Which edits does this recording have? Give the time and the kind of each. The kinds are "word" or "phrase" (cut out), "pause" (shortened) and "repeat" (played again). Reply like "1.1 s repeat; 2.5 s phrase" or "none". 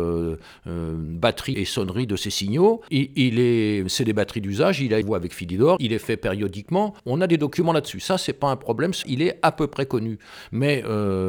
1.5 s word; 2.9 s word; 5.0 s phrase; 5.8 s word; 7.0 s pause; 9.0 s word